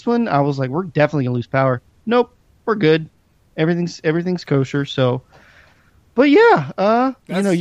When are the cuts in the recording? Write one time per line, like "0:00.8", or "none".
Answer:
none